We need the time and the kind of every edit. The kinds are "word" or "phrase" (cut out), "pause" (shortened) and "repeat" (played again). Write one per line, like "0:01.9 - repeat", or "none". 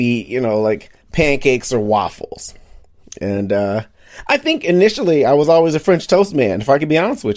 0:01.0 - pause